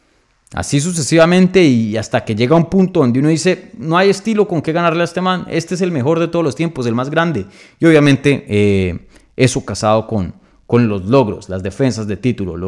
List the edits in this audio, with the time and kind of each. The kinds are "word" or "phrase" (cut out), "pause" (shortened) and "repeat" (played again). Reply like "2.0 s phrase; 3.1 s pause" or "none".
none